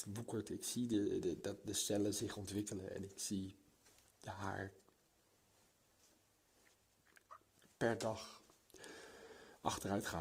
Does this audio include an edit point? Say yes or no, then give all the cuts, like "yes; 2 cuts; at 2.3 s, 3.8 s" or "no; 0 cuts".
no; 0 cuts